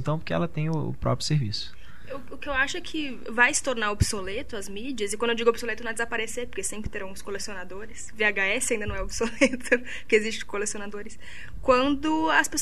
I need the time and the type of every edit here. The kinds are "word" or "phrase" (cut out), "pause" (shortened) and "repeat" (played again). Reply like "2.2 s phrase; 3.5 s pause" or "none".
none